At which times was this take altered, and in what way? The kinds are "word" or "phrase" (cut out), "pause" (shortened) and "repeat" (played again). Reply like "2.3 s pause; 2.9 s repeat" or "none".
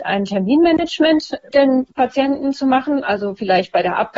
1.5 s word